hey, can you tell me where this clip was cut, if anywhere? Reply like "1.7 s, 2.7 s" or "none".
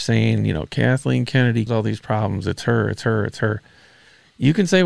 1.7 s